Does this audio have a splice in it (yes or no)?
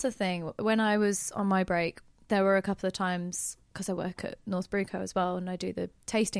no